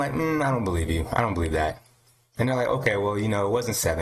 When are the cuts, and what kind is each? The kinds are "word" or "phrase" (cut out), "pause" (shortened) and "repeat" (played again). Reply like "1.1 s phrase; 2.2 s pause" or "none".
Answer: none